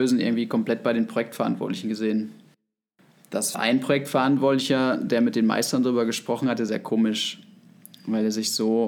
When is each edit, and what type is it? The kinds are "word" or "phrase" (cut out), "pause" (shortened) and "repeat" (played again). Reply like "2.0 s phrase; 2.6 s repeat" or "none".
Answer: 3.5 s word; 6.7 s word